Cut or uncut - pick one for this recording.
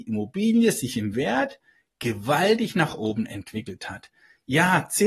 uncut